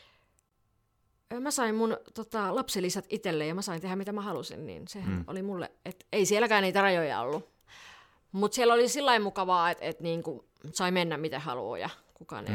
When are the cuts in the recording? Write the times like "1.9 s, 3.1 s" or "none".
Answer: 10.7 s